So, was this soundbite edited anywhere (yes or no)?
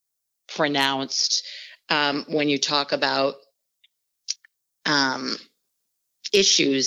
no